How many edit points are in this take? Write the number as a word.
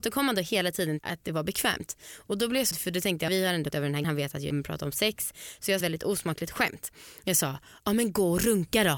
seven